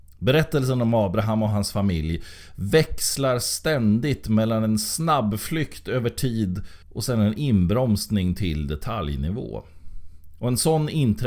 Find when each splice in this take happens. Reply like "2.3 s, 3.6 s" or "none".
6.8 s